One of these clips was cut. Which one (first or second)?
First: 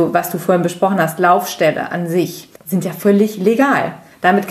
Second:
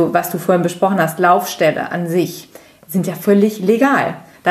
first